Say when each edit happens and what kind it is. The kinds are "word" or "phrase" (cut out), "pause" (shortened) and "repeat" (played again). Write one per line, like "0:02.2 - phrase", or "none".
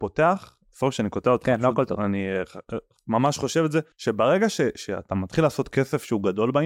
0:03.9 - pause